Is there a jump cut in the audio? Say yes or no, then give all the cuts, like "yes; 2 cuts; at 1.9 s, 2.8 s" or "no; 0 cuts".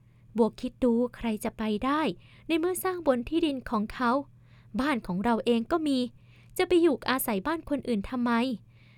no; 0 cuts